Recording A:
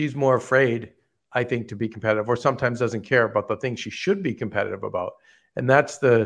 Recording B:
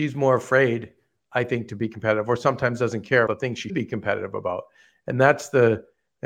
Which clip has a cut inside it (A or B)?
B